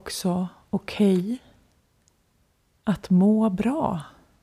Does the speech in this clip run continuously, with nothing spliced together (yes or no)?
yes